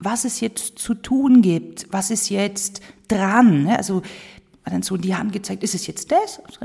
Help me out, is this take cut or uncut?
uncut